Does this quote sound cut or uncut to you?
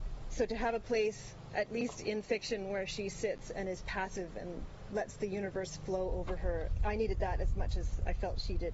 cut